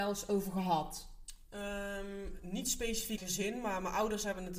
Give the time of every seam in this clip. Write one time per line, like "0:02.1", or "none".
0:02.4
0:03.2